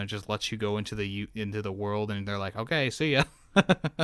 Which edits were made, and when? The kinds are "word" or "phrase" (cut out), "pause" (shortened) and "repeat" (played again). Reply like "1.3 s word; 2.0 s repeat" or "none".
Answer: none